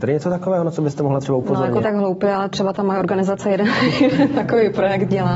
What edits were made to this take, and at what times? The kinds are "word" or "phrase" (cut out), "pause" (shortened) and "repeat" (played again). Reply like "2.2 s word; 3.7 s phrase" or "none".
1.8 s phrase